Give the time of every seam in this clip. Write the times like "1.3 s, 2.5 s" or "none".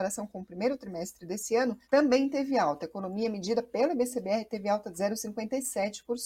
1.8 s